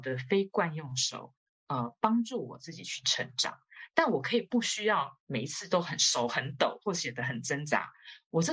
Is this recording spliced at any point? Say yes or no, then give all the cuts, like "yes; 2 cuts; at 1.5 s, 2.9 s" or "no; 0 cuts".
no; 0 cuts